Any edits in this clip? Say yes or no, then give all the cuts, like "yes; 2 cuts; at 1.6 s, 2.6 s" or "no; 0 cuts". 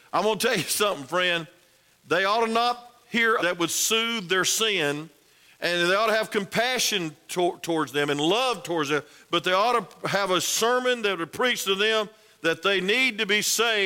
yes; 1 cut; at 3.4 s